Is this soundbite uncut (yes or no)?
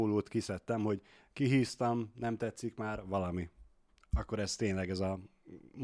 yes